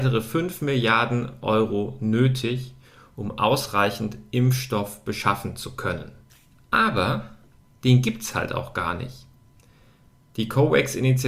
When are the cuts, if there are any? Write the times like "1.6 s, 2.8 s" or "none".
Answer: none